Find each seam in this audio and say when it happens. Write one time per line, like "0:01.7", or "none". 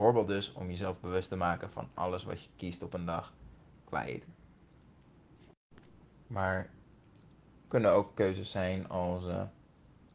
none